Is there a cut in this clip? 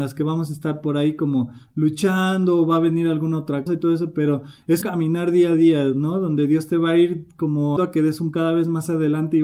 yes; 4 cuts; at 3.7 s, 4.8 s, 7.8 s, 8.3 s

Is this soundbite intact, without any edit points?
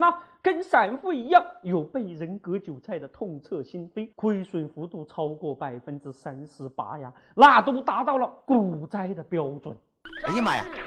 no; 1 cut; at 4.1 s

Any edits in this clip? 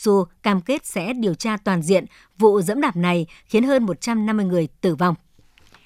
no; 0 cuts

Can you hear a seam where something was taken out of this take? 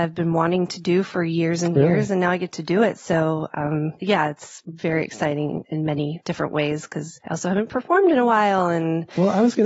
no; 0 cuts

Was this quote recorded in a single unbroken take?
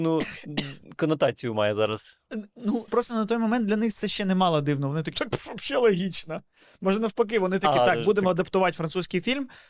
no; 2 cuts; at 2.9 s, 5.1 s

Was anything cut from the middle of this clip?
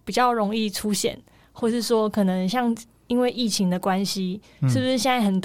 no; 0 cuts

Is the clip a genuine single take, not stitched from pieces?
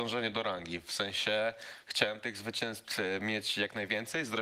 yes; 0 cuts

